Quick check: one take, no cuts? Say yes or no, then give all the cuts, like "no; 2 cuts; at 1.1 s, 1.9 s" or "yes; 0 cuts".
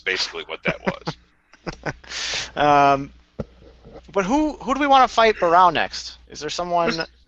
no; 3 cuts; at 2.0 s, 4.0 s, 6.2 s